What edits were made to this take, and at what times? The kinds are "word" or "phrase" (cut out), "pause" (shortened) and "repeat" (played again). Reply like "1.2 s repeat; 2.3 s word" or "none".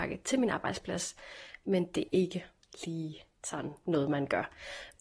2.1 s word